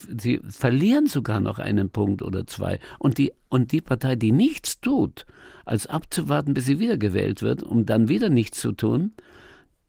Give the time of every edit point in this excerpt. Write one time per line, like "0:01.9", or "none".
none